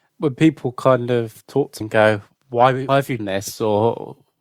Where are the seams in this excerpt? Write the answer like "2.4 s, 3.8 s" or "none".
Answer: 1.8 s, 2.9 s, 3.2 s